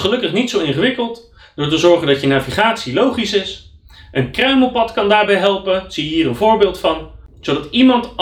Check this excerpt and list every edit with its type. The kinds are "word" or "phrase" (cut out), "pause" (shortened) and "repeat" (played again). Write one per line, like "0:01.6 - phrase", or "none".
none